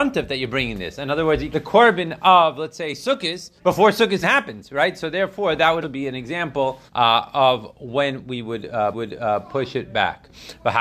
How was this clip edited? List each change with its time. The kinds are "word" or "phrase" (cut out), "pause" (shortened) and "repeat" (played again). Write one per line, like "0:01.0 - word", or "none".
0:01.5 - phrase
0:03.6 - pause
0:04.2 - word
0:05.8 - word
0:06.9 - pause
0:08.9 - repeat